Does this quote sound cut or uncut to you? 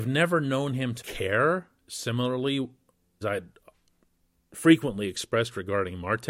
cut